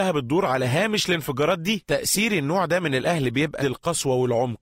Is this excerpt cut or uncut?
cut